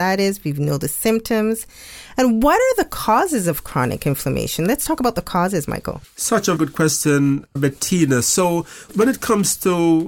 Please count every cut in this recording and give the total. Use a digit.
4